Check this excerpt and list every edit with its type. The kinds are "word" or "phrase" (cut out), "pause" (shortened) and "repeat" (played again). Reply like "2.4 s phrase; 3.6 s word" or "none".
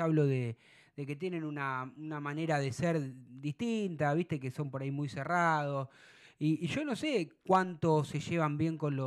none